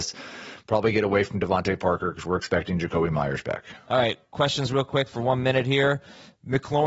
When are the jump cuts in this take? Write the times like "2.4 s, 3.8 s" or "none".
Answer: none